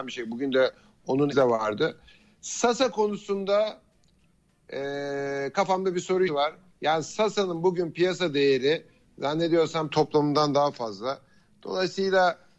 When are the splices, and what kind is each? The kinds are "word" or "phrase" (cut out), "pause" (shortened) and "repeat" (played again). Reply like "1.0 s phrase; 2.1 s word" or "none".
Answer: 1.3 s word; 6.3 s word; 9.9 s phrase